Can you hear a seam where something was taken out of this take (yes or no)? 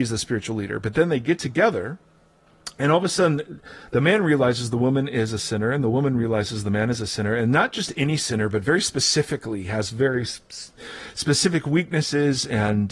no